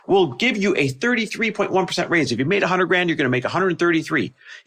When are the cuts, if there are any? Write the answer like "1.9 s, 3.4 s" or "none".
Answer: none